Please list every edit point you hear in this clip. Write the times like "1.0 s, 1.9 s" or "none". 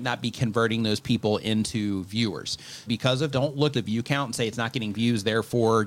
2.9 s, 3.3 s, 3.7 s

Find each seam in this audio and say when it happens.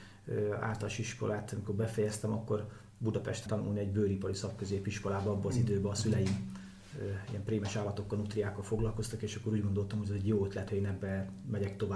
3.5 s, 10.7 s

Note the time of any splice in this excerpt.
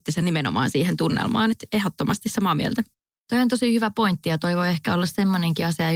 none

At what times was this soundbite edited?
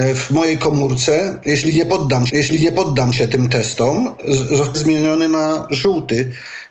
2.3 s, 4.7 s

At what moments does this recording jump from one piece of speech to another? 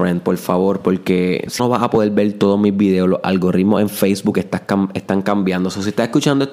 1.6 s

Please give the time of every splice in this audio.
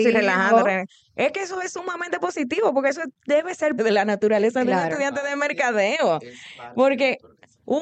3.8 s

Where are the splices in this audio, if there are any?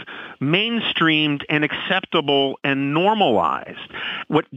none

